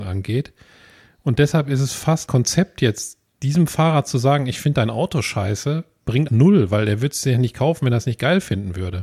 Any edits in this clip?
yes; 2 cuts; at 2.3 s, 6.3 s

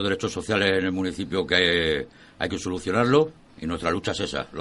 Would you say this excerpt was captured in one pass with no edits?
yes; 0 cuts

